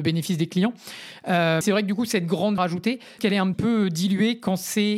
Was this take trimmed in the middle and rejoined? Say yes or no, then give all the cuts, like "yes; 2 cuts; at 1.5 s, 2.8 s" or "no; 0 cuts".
yes; 4 cuts; at 1.6 s, 2.6 s, 3.2 s, 3.5 s